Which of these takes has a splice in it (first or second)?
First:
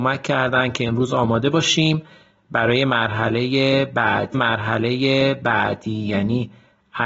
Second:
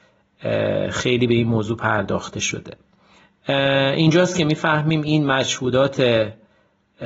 first